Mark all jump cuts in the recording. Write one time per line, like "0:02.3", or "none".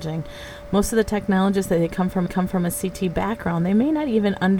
0:02.3